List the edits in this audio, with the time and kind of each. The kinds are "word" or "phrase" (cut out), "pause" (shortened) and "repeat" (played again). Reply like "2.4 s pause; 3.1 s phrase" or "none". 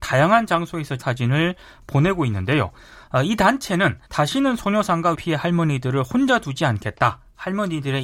1.0 s phrase; 4.1 s pause; 5.1 s word